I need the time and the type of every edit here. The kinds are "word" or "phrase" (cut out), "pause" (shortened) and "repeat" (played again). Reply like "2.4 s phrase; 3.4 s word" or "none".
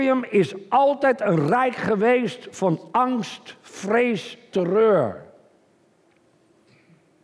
4.5 s word